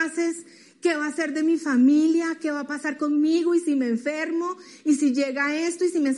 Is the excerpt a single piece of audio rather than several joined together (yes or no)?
yes